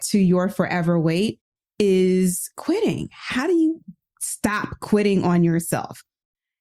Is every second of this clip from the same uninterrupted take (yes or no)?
yes